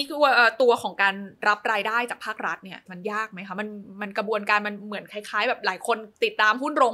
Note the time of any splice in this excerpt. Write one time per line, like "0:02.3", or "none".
0:01.4
0:02.9